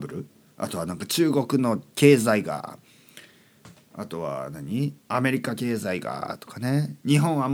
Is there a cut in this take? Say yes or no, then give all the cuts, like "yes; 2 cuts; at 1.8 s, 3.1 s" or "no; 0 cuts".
yes; 1 cut; at 5.0 s